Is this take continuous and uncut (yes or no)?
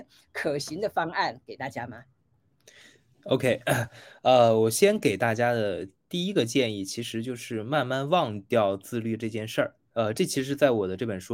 no